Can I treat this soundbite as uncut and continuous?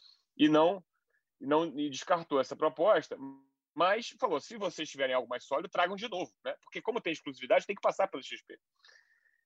yes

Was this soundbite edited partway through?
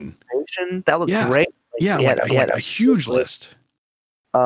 yes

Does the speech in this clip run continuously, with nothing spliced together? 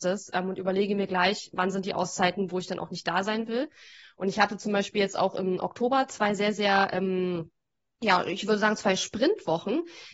yes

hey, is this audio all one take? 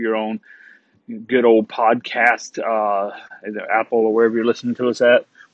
yes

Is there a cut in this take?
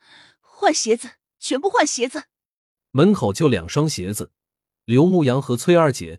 no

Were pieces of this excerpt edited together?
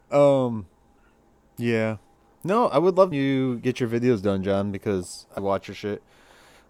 yes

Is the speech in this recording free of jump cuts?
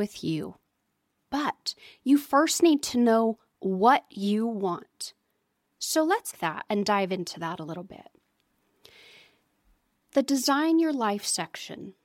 no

